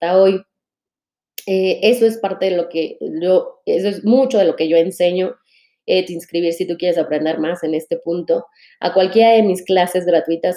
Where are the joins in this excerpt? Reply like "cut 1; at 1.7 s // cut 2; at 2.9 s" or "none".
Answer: cut 1; at 6.1 s